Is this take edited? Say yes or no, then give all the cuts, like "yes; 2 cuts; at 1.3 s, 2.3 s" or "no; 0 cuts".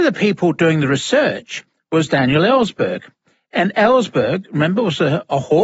no; 0 cuts